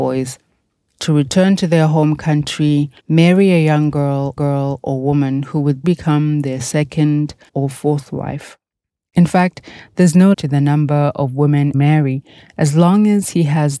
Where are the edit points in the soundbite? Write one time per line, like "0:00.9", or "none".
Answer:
0:03.0
0:04.4
0:05.8
0:07.5
0:10.3
0:11.7

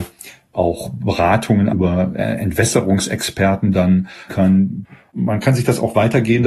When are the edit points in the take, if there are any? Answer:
0:01.7
0:03.7
0:04.3

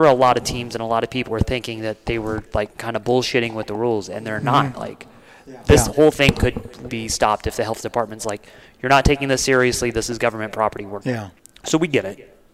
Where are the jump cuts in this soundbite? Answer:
0:01.3
0:02.5
0:06.9
0:11.0

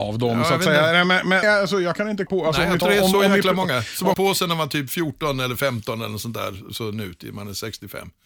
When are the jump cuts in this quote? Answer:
0:01.4
0:02.3
0:02.8
0:04.1

